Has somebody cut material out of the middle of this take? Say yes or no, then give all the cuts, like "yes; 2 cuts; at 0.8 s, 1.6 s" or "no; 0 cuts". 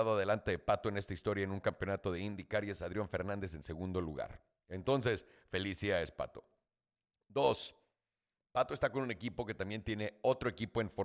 no; 0 cuts